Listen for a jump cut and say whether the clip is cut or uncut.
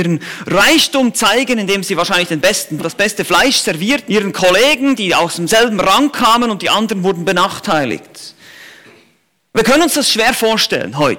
cut